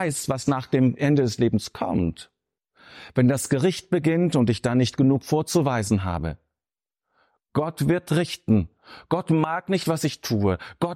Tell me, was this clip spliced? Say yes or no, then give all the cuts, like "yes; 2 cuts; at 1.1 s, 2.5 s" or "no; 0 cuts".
no; 0 cuts